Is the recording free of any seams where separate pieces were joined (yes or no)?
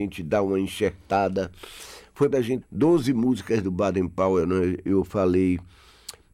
no